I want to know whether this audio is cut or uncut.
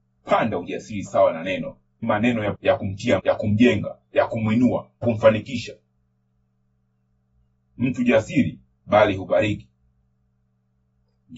cut